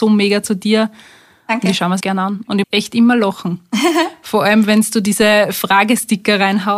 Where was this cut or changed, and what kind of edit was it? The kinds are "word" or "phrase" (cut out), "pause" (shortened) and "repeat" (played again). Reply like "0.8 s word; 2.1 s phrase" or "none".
2.0 s word; 2.6 s word

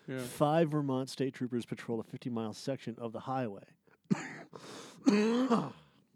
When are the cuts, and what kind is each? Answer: none

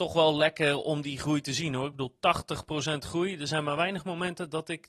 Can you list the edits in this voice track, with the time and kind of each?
none

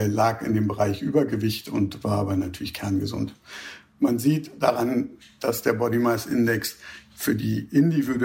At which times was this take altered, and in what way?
none

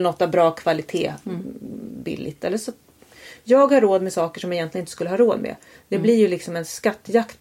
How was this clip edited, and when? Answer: none

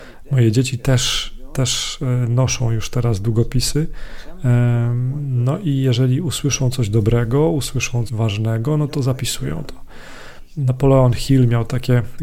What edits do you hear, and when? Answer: 8.1 s word

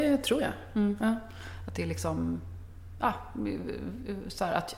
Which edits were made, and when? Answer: none

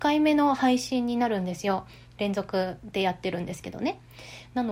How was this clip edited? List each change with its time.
none

